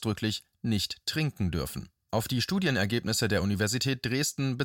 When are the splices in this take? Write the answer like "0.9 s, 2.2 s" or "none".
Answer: 2.0 s